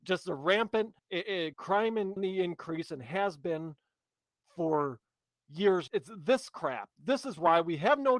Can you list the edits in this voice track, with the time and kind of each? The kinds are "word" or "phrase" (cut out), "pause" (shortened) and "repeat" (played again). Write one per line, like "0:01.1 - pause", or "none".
0:01.0 - pause
0:01.5 - word
0:02.2 - word
0:05.9 - word